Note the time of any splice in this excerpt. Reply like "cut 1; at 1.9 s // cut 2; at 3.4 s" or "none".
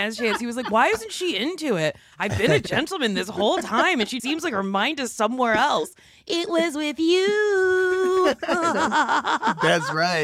cut 1; at 4.2 s